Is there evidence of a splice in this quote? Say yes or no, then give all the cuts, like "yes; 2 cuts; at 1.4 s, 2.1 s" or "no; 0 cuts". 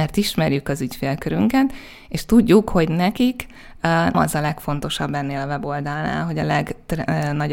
yes; 1 cut; at 4.1 s